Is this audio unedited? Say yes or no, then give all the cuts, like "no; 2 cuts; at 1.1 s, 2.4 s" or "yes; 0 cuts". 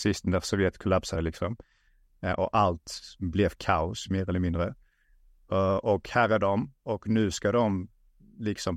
yes; 0 cuts